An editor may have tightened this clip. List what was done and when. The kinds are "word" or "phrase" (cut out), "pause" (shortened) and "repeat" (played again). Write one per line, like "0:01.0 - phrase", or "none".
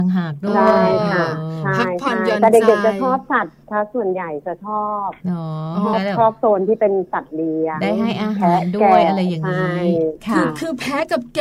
0:03.6 - pause
0:05.2 - pause